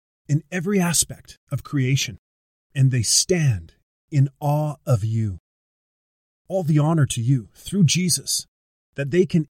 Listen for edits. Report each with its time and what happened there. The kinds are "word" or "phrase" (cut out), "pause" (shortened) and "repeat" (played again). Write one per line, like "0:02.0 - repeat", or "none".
none